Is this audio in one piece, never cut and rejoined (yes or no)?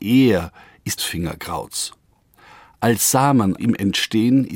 no